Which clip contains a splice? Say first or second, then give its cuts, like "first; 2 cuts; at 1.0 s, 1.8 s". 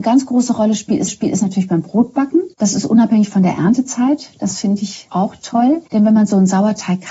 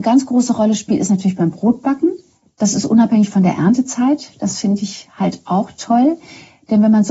first; 4 cuts; at 1.1 s, 2.5 s, 5.1 s, 5.9 s